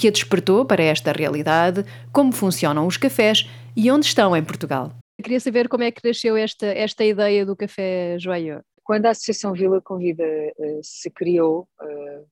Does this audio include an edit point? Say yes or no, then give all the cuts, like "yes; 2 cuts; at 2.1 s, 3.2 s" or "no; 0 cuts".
yes; 1 cut; at 5.1 s